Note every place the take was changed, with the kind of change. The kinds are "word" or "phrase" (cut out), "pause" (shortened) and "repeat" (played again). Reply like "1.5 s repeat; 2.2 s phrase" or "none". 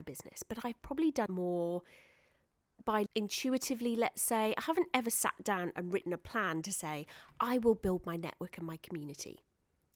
1.3 s word; 3.1 s word